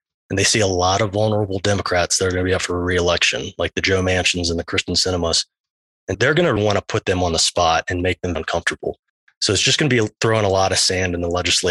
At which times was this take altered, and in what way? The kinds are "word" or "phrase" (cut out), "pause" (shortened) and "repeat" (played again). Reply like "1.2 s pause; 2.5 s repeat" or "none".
6.1 s word; 6.6 s word; 8.4 s word